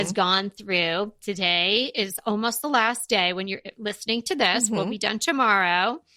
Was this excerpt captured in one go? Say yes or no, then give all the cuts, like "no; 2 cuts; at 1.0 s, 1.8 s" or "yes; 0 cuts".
yes; 0 cuts